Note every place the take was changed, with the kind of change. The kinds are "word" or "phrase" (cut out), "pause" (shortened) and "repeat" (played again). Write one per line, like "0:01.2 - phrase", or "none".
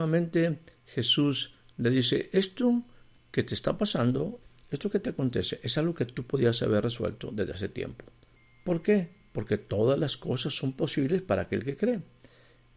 none